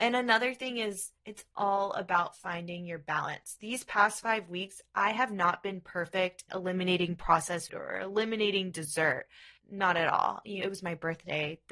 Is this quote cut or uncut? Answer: cut